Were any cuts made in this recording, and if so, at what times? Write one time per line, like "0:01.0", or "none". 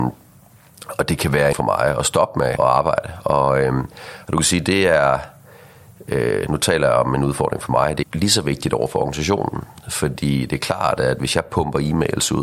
0:01.5
0:02.6
0:08.0